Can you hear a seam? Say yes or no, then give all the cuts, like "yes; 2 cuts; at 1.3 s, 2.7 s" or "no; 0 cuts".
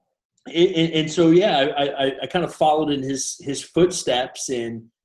no; 0 cuts